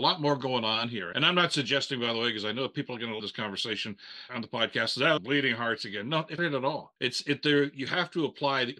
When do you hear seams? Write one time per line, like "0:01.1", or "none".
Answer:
0:01.1
0:03.2
0:04.3
0:05.2
0:06.4
0:07.0